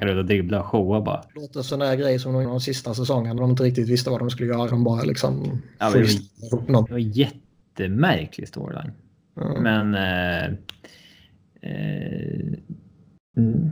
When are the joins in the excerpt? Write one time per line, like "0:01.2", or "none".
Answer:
0:01.3
0:01.7
0:02.4
0:03.4
0:04.7
0:06.9